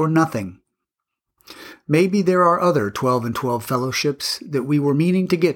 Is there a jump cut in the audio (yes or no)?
no